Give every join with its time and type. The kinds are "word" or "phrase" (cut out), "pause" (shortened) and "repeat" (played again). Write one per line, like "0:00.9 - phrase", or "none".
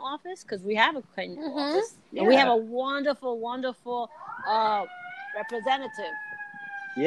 0:02.0 - pause